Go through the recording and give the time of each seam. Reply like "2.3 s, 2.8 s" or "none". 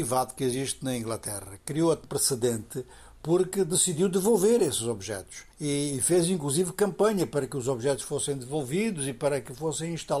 2.0 s, 5.5 s